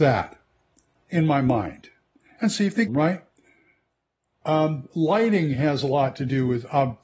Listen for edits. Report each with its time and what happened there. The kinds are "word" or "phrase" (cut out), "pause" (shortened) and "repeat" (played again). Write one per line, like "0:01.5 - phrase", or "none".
0:02.9 - phrase